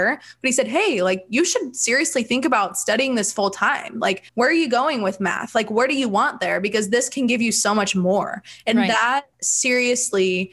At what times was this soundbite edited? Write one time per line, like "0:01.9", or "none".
0:04.3
0:09.3

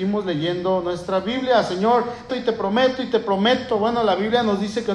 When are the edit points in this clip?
0:02.3

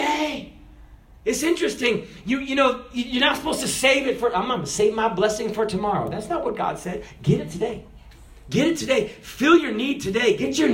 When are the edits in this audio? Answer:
none

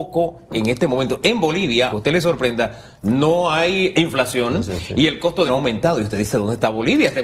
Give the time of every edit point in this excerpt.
0:01.9
0:03.9
0:05.5

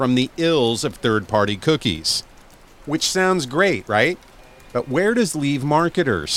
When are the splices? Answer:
0:05.3

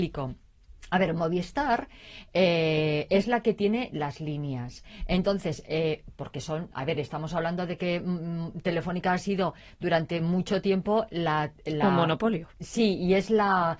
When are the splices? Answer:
none

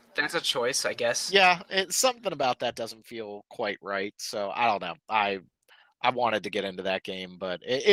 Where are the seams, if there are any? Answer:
0:05.7

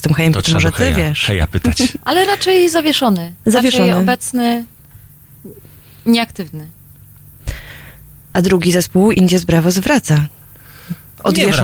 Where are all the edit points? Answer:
none

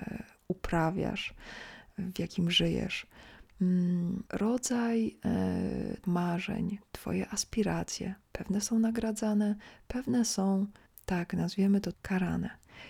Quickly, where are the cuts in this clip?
0:04.3
0:06.0
0:10.9
0:11.9

